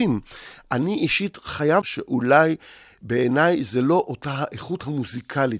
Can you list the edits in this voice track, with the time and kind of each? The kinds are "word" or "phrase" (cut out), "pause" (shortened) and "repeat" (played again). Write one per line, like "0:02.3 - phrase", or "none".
0:01.8 - phrase